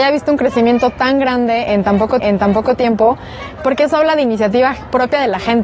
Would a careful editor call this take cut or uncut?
cut